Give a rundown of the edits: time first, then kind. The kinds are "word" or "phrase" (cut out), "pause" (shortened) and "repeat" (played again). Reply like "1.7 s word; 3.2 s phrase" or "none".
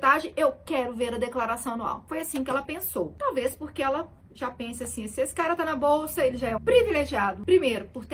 6.6 s word